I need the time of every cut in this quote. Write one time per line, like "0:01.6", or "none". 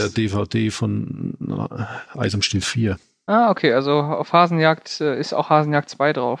none

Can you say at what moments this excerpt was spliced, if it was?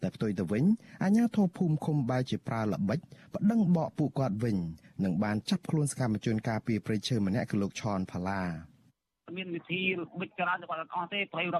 none

